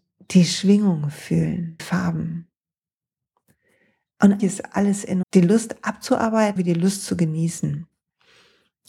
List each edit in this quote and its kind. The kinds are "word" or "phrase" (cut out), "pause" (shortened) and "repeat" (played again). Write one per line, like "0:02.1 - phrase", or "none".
0:01.8 - word
0:04.4 - word
0:05.2 - word
0:06.6 - word